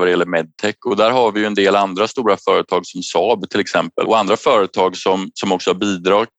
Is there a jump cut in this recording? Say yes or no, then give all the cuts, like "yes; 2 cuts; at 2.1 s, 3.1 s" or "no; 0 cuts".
yes; 1 cut; at 4.1 s